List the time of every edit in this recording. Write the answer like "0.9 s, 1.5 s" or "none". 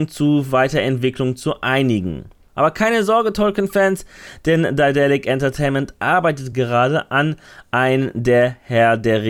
none